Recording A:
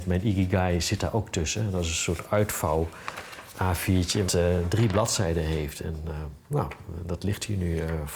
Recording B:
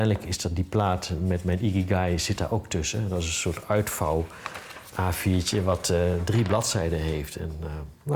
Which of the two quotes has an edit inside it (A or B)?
A